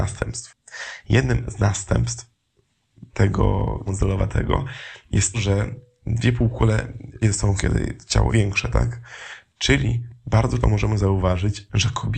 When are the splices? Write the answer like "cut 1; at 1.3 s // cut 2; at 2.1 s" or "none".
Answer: cut 1; at 3.9 s // cut 2; at 5.3 s // cut 3; at 7.2 s // cut 4; at 7.6 s // cut 5; at 8.3 s // cut 6; at 10.6 s